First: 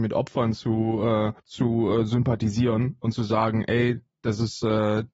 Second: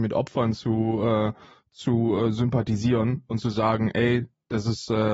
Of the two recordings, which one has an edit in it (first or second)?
first